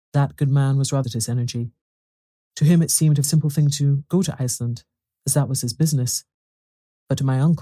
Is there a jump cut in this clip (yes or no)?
yes